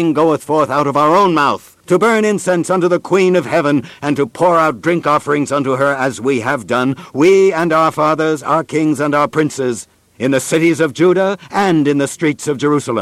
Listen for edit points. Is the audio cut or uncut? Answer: cut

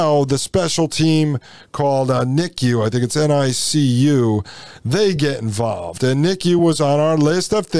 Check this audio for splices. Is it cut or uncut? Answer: uncut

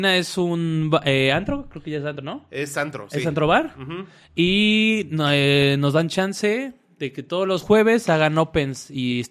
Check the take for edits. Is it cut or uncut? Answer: uncut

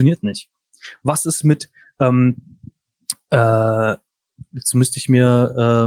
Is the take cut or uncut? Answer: uncut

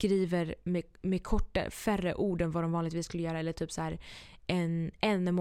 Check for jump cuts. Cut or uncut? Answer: uncut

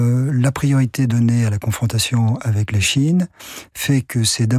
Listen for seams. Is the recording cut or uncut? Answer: uncut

